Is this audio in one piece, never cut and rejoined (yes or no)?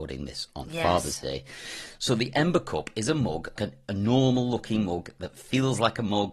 no